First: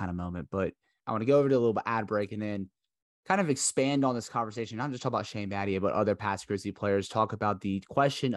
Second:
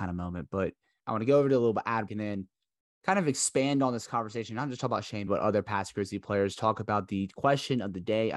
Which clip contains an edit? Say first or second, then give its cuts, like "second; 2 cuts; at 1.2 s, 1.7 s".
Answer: second; 2 cuts; at 2.1 s, 5.3 s